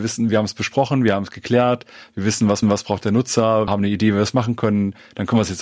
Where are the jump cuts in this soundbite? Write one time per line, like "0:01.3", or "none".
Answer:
0:02.6
0:03.7